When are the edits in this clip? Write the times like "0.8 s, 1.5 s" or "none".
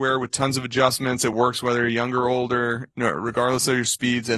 none